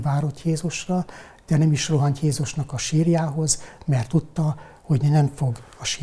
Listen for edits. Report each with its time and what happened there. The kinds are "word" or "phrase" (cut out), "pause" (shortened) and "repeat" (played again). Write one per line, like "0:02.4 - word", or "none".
none